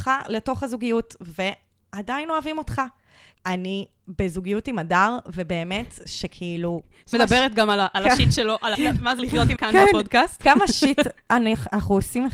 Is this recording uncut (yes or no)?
no